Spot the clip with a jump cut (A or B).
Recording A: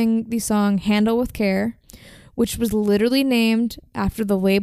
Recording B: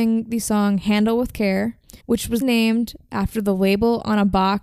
B